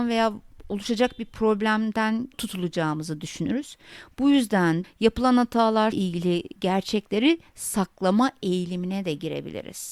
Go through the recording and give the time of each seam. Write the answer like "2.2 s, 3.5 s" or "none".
2.3 s, 4.8 s, 5.9 s